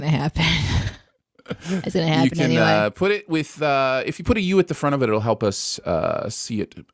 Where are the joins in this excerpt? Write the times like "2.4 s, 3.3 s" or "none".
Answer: none